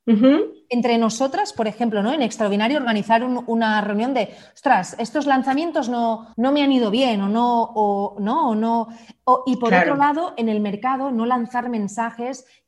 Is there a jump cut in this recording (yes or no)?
yes